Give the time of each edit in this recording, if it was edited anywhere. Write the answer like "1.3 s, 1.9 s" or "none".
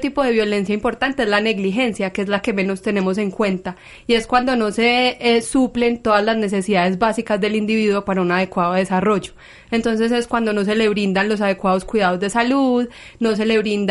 none